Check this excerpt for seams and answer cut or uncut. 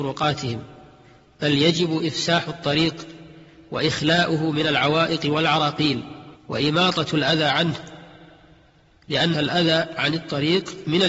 cut